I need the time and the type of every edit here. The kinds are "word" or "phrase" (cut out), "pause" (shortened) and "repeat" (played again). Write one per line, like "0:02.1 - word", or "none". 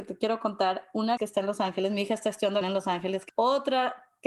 0:01.2 - word
0:02.6 - word
0:03.3 - word